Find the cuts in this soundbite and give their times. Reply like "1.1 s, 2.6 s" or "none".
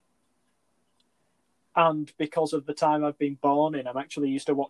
none